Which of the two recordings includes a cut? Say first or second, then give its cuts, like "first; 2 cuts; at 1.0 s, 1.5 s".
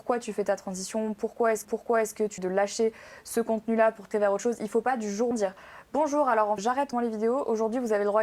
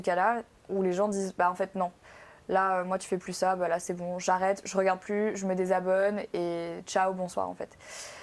first; 6 cuts; at 1.6 s, 2.4 s, 4.1 s, 5.3 s, 6.6 s, 6.9 s